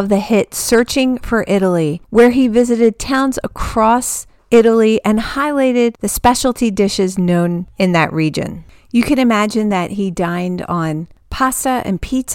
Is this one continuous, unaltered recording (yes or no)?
yes